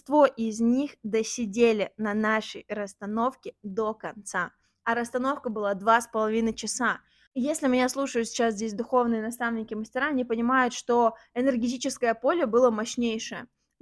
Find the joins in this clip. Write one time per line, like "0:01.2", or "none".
none